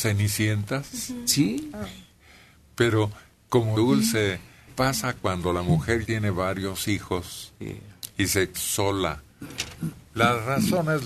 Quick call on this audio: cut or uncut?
cut